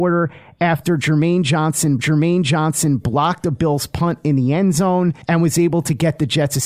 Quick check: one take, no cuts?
no; 2 cuts; at 2.0 s, 5.2 s

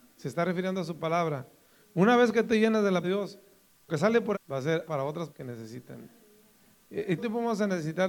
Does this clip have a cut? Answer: yes; 7 cuts; at 2.4 s, 3.0 s, 3.9 s, 4.3 s, 4.9 s, 5.3 s, 7.2 s

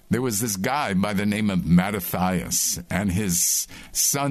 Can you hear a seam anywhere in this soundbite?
no; 0 cuts

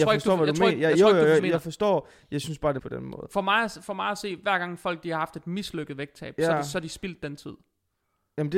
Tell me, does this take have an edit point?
yes; 2 cuts; at 1.4 s, 2.8 s

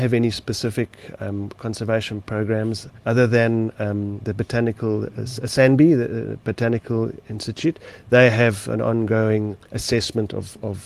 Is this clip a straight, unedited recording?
no; 1 cut; at 3.0 s

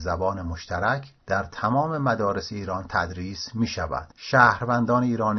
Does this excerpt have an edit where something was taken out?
yes; 2 cuts; at 1.2 s, 4.1 s

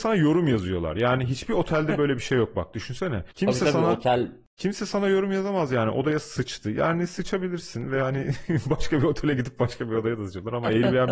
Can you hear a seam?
yes; 1 cut; at 3.3 s

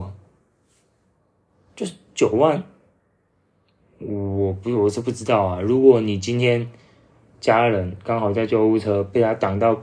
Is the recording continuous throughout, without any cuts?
yes; 0 cuts

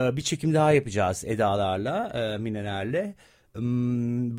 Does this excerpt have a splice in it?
no; 0 cuts

